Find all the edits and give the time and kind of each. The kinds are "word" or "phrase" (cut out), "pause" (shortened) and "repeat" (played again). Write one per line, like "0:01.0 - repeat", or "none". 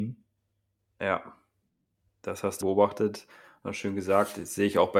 0:02.6 - phrase